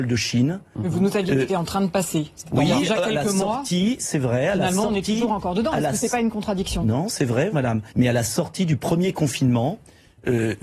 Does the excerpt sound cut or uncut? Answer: cut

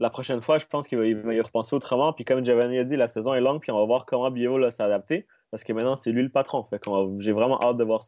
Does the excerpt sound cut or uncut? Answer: uncut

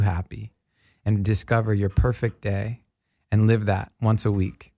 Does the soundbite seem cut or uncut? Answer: uncut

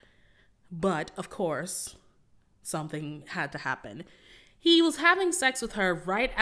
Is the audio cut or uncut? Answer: uncut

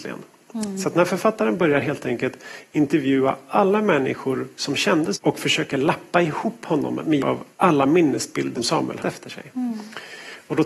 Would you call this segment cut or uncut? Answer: cut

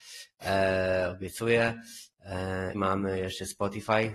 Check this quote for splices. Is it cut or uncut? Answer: cut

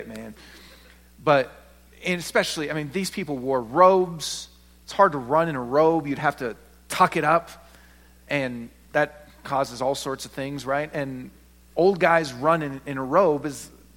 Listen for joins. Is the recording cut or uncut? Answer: uncut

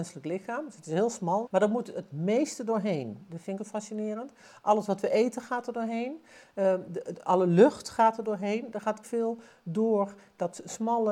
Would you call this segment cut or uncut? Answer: cut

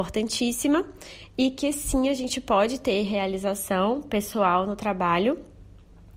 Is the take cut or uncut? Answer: uncut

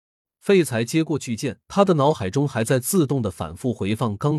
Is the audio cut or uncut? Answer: cut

